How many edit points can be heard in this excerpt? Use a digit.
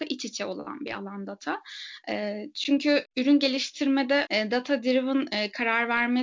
2